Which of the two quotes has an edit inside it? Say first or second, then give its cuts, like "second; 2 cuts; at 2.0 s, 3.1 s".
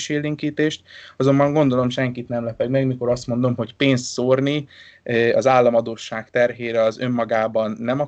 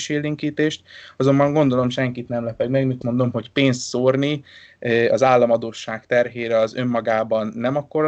second; 1 cut; at 3.0 s